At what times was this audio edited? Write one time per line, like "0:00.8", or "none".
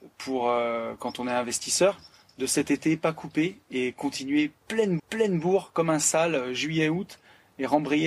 0:05.0